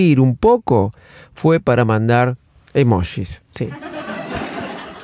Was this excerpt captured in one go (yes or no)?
yes